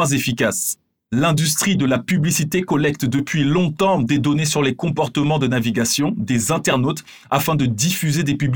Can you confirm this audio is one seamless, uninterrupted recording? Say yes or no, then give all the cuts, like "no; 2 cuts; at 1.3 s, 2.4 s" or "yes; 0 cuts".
yes; 0 cuts